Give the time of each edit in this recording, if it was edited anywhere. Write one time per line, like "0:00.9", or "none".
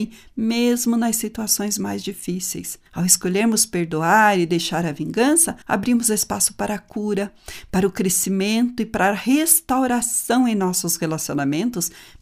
0:02.9
0:05.6